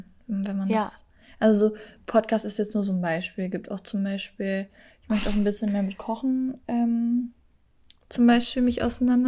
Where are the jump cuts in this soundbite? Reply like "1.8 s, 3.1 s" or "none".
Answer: none